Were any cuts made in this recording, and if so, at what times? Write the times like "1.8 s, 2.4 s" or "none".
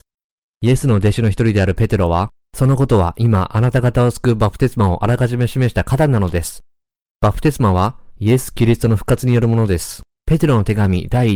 2.4 s, 10.1 s